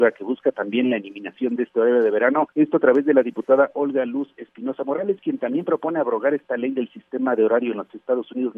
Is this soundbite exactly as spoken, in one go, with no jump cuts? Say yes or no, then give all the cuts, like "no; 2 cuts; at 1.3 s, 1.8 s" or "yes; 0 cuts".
no; 1 cut; at 2.5 s